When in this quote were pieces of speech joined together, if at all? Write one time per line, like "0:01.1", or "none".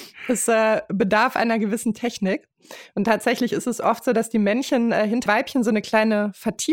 0:05.3

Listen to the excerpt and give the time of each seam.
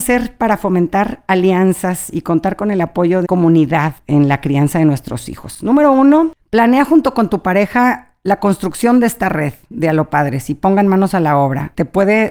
0:03.2

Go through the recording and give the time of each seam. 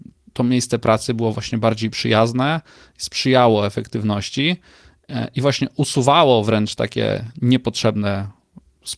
none

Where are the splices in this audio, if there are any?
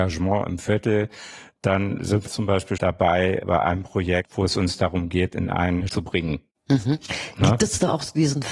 0:02.3
0:02.8
0:05.9

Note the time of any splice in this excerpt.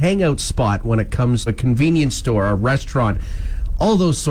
0:01.5

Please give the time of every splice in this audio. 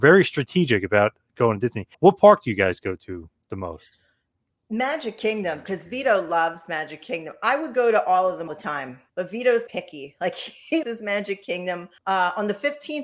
0:01.9
0:08.5
0:09.1
0:09.7
0:10.8
0:12.0

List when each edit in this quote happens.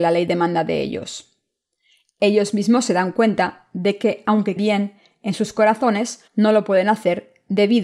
0:04.6
0:06.3

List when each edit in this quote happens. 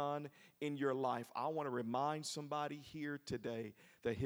none

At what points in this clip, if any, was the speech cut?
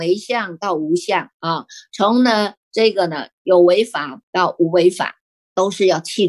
0:01.3
0:05.4

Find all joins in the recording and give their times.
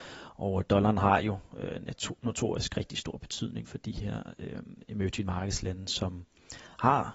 none

